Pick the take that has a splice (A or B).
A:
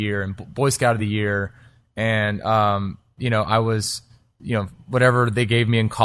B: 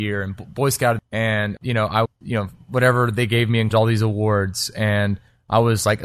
B